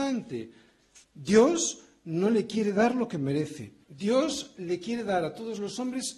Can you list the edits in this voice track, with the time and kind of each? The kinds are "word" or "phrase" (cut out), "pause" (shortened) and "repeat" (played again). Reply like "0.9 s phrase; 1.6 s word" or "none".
1.0 s pause; 3.8 s pause

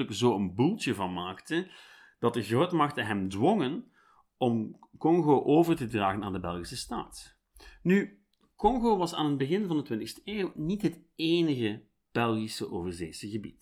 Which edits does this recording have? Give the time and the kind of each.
none

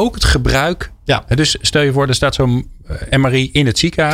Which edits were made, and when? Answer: none

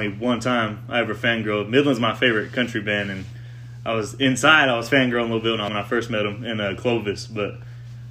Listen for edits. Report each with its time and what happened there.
5.7 s phrase

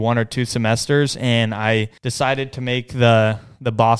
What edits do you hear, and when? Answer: 2.0 s pause

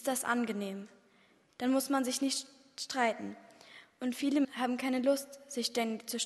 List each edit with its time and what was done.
4.4 s word

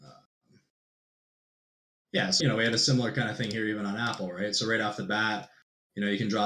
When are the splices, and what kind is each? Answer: 2.4 s phrase

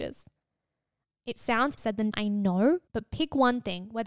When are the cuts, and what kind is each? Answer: 1.8 s word; 2.1 s word; 2.9 s pause

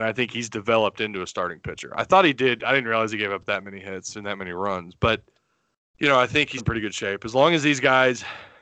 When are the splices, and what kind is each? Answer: 5.4 s pause; 6.6 s word

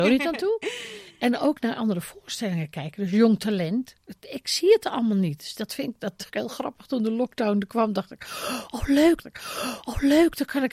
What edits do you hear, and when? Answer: 6.3 s word; 9.2 s repeat

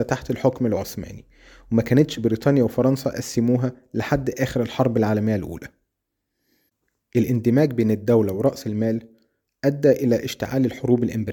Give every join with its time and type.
none

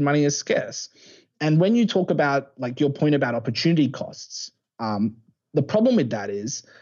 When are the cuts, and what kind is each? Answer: none

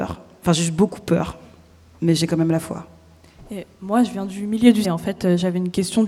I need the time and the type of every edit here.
4.8 s word

